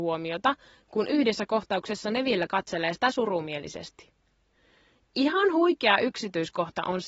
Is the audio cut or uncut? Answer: uncut